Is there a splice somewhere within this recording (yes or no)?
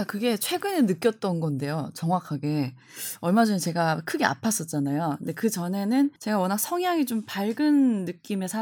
yes